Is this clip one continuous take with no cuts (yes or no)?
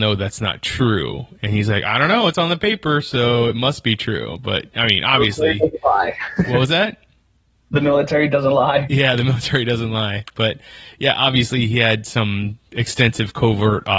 yes